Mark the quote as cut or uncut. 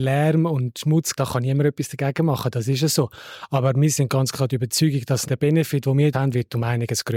cut